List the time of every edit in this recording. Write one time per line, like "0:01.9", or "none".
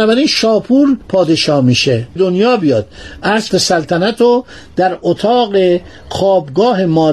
0:01.0
0:02.2
0:03.5